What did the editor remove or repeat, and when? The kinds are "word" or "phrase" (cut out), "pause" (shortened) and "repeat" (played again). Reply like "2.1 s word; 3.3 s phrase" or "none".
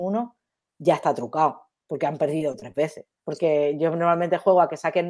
3.1 s pause

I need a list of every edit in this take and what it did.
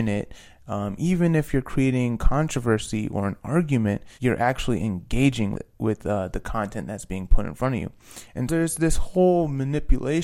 4.1 s pause; 5.5 s word; 8.5 s word

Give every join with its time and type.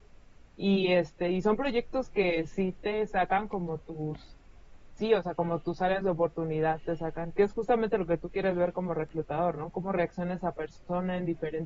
5.0 s word

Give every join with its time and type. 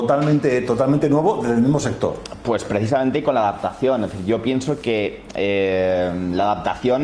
none

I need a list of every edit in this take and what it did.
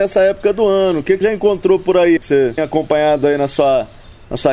1.2 s word; 2.2 s word; 2.6 s word

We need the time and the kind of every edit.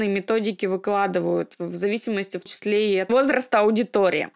2.5 s word

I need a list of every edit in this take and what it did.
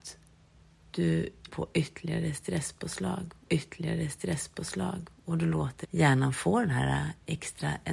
1.5 s word; 3.5 s repeat; 5.8 s word

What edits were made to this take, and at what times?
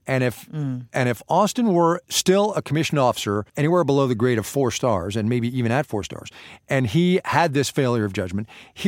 2.0 s pause; 3.5 s pause

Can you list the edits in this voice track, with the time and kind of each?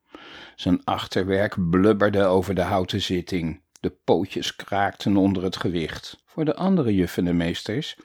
3.7 s pause; 6.2 s pause

